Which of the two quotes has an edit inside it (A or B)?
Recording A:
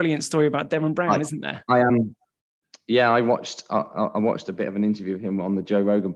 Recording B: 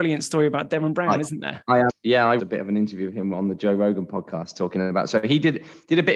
B